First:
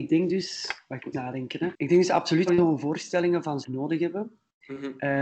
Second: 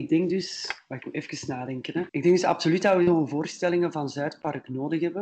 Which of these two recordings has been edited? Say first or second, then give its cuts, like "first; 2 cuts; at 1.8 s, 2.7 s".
first; 3 cuts; at 1.1 s, 2.5 s, 3.6 s